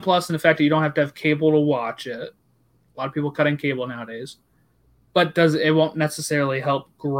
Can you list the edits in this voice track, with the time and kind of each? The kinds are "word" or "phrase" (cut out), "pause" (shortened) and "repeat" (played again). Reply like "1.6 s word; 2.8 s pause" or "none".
4.8 s pause